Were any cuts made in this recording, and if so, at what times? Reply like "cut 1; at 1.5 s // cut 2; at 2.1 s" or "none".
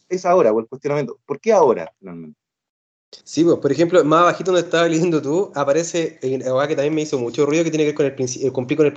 cut 1; at 3.2 s